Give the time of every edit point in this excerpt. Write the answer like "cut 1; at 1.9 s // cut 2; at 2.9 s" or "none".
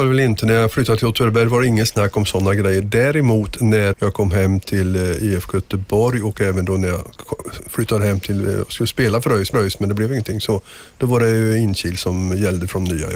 cut 1; at 3.9 s // cut 2; at 9.5 s